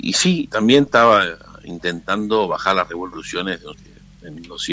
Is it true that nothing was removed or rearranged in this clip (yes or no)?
no